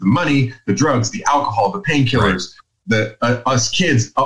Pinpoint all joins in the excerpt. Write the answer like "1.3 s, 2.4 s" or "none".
none